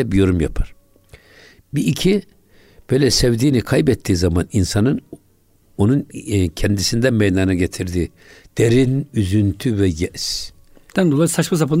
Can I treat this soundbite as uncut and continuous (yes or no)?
yes